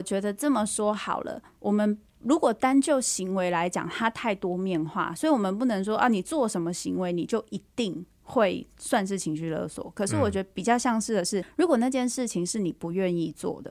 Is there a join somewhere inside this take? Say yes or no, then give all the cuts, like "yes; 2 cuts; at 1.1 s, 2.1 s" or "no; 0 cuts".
yes; 1 cut; at 11.4 s